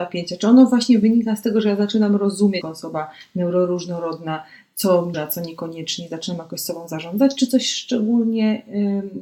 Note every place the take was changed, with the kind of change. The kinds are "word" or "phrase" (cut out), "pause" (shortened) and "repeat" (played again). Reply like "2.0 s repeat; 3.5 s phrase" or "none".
2.6 s word; 5.1 s word